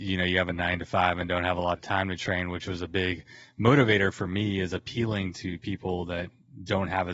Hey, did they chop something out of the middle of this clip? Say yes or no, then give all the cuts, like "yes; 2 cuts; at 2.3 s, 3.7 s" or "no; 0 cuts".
no; 0 cuts